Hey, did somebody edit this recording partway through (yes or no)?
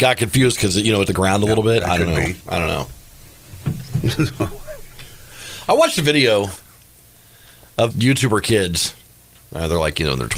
yes